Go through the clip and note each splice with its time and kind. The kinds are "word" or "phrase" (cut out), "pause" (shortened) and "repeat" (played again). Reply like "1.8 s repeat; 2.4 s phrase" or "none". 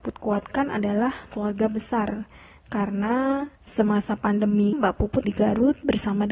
1.3 s word; 3.6 s pause; 4.7 s word; 5.2 s word